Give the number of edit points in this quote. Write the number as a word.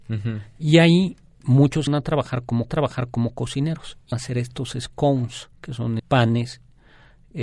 five